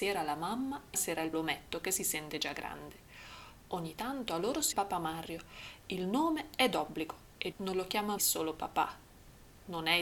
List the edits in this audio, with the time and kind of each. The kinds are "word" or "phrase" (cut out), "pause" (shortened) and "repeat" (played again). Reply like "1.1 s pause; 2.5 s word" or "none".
0.9 s word; 1.3 s word; 4.7 s word; 7.5 s word; 8.2 s word

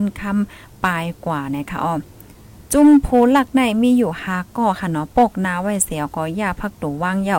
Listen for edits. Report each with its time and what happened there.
2.7 s pause

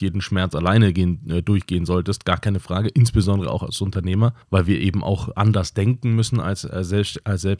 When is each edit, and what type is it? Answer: 4.4 s pause

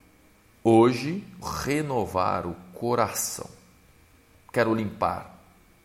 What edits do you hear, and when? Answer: 1.4 s word

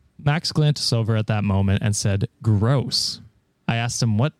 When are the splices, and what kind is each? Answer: none

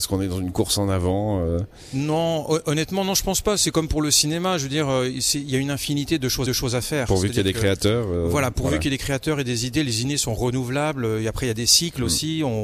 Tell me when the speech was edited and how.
6.5 s repeat

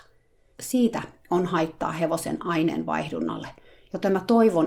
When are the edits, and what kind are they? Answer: none

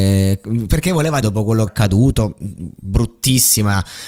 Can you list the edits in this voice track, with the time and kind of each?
1.2 s word; 1.7 s word

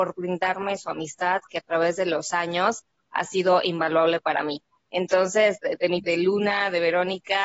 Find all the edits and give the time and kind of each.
6.0 s word

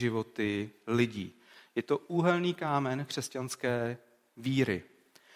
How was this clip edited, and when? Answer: none

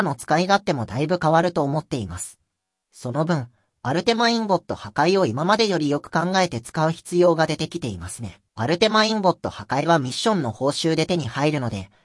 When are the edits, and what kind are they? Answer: 8.5 s pause

